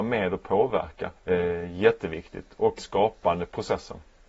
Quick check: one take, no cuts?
no; 2 cuts; at 1.2 s, 2.8 s

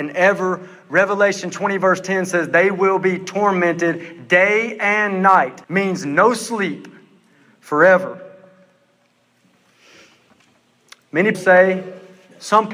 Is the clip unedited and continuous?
no; 2 cuts; at 5.6 s, 11.3 s

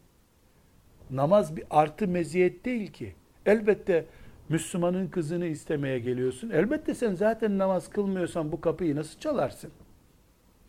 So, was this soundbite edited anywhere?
no; 0 cuts

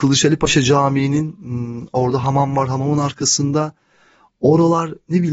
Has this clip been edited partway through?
no; 0 cuts

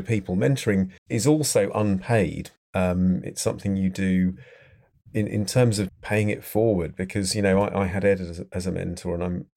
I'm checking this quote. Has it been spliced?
yes; 2 cuts; at 1.0 s, 5.9 s

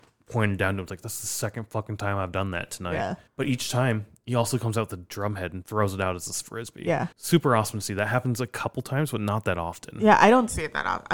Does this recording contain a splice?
yes; 2 cuts; at 3.3 s, 7.1 s

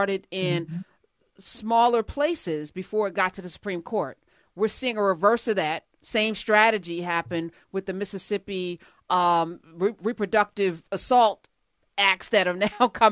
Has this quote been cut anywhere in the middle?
no; 0 cuts

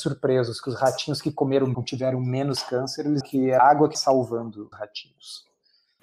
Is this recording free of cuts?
no; 5 cuts; at 1.7 s, 3.2 s, 3.6 s, 3.9 s, 4.7 s

